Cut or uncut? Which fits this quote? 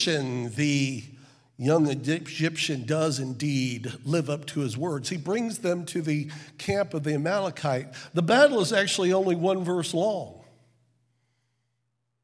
uncut